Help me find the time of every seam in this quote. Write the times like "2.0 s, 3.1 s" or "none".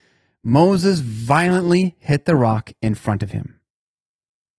none